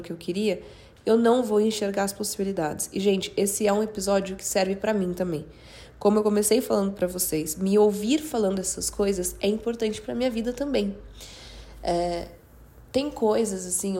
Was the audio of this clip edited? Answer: no; 0 cuts

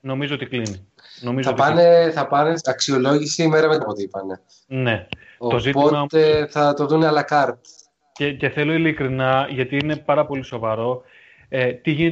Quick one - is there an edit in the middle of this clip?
yes; 2 cuts; at 2.6 s, 3.8 s

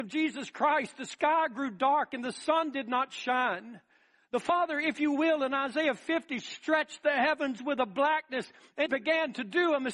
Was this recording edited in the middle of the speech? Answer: yes; 1 cut; at 8.9 s

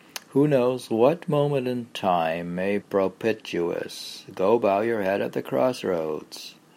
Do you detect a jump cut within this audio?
yes; 1 cut; at 2.8 s

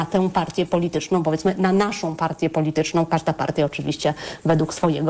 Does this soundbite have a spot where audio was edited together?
no; 0 cuts

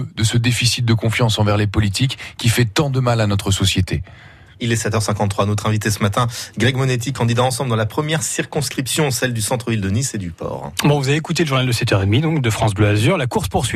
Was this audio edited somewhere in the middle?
no; 0 cuts

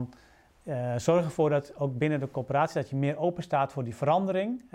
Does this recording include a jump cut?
no; 0 cuts

